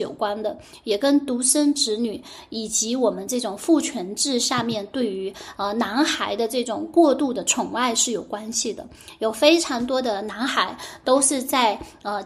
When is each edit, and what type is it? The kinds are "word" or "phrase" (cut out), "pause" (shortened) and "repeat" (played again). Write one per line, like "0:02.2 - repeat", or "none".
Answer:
none